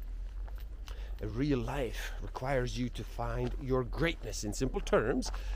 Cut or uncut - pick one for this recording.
uncut